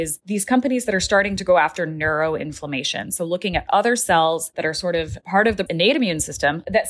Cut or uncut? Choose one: cut